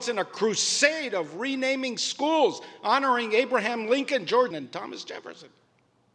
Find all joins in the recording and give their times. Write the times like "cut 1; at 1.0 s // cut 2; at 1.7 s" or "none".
cut 1; at 4.5 s